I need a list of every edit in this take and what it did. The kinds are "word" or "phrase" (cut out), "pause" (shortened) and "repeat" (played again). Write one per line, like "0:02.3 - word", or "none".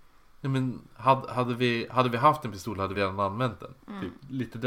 0:02.9 - word

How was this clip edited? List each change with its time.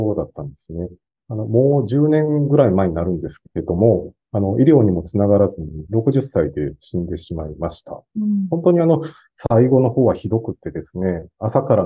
none

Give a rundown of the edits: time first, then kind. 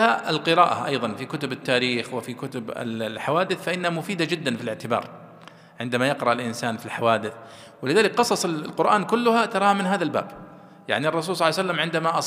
none

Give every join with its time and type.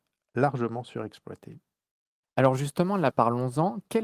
0:03.1 - word

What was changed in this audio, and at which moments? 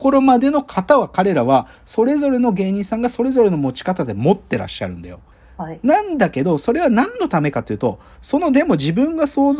0:05.3 - pause

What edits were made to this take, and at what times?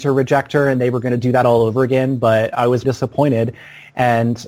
0:02.8 - word

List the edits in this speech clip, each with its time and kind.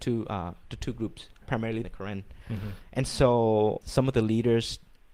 0:01.4 - word
0:01.8 - phrase
0:03.8 - word

